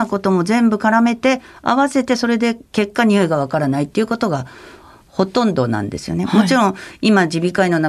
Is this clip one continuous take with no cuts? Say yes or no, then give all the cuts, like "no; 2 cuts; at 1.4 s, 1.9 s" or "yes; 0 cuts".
yes; 0 cuts